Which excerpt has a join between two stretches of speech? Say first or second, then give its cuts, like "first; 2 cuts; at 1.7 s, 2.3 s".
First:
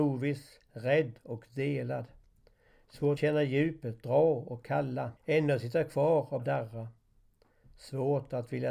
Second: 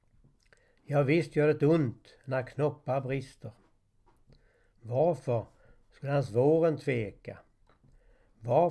first; 3 cuts; at 3.2 s, 5.2 s, 6.4 s